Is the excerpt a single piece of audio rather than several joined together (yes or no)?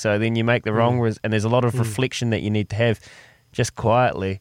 yes